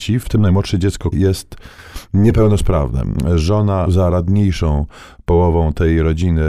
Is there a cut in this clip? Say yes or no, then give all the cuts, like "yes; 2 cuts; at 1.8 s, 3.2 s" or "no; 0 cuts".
yes; 2 cuts; at 1.1 s, 3.9 s